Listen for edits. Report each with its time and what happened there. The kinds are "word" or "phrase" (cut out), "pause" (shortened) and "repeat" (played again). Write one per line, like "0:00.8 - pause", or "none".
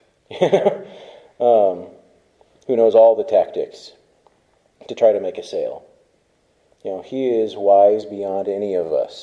none